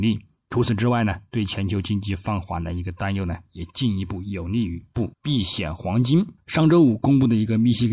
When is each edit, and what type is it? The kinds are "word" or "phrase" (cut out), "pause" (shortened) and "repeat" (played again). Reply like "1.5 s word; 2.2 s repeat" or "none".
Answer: 5.1 s pause; 6.4 s pause